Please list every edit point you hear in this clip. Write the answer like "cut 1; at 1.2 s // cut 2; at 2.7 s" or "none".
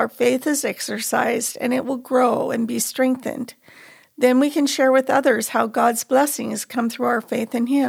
none